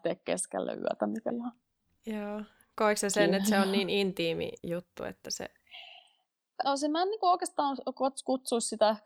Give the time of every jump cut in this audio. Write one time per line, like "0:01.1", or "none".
0:01.3
0:04.6
0:06.6